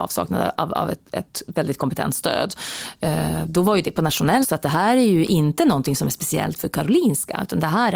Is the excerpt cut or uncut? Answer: cut